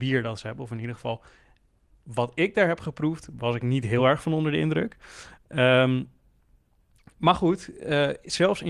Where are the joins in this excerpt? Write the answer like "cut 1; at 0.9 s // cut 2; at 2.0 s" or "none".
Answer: none